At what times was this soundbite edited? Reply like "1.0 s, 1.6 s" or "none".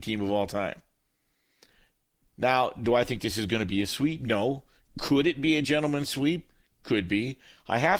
none